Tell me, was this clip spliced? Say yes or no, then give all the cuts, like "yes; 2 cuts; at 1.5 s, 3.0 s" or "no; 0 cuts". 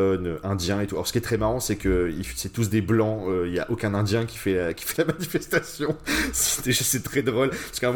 no; 0 cuts